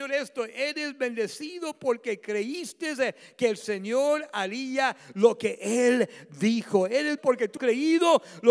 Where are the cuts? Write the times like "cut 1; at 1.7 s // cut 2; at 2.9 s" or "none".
cut 1; at 7.2 s // cut 2; at 7.6 s